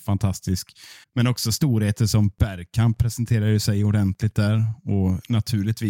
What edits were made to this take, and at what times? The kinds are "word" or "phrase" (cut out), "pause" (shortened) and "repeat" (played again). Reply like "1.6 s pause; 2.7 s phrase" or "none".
1.0 s pause

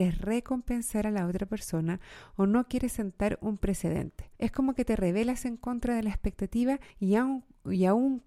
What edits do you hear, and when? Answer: 4.4 s pause; 6.9 s pause

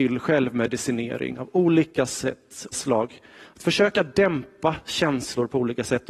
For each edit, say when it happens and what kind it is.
2.7 s phrase

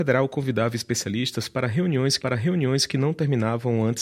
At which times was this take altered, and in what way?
2.2 s repeat

